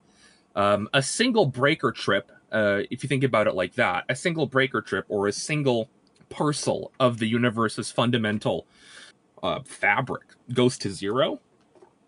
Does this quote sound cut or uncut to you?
cut